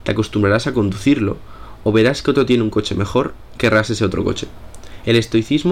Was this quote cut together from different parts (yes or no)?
yes